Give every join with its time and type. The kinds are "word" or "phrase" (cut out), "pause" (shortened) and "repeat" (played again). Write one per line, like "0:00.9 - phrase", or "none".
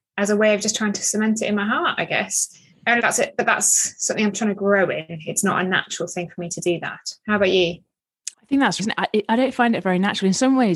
0:03.0 - word
0:08.3 - pause
0:08.8 - word